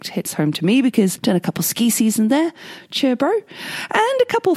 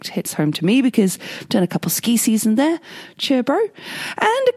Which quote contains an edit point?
first; 1 cut; at 1.2 s

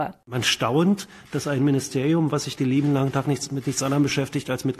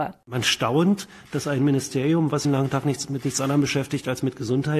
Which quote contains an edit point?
second; 1 cut; at 2.4 s

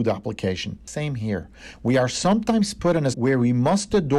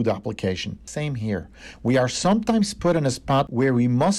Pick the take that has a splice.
first; 1 cut; at 3.1 s

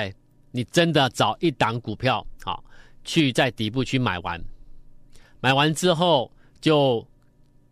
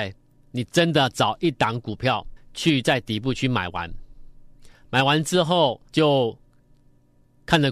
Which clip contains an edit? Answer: second; 2 cuts; at 2.4 s, 5.9 s

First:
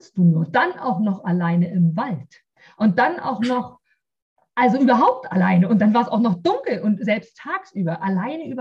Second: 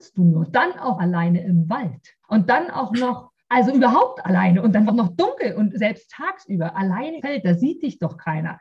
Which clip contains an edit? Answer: second; 5 cuts; at 0.9 s, 2.2 s, 3.4 s, 4.9 s, 7.2 s

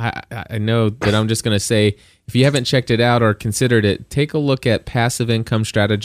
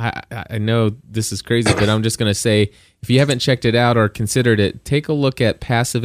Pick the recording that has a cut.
first; 1 cut; at 1.0 s

